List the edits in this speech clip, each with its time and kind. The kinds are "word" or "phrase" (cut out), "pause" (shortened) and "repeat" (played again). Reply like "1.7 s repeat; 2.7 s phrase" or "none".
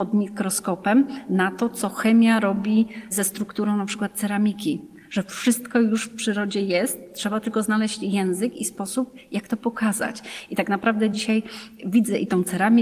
none